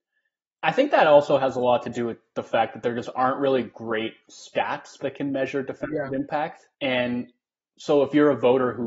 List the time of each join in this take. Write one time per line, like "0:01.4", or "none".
0:06.7